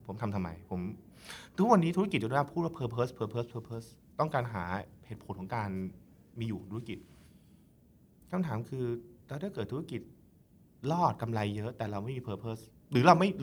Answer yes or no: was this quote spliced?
no